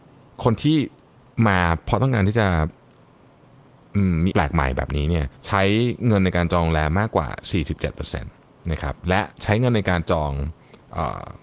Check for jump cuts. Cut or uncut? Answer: cut